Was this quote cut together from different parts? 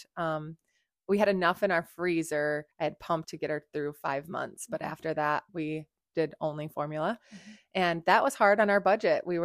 yes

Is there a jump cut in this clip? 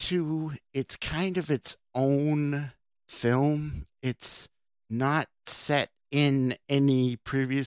no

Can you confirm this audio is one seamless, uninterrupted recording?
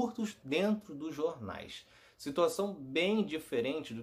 yes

